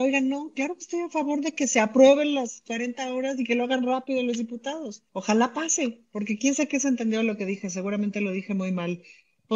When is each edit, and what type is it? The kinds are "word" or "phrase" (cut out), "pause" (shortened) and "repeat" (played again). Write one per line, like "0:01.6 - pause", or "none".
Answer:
0:05.1 - pause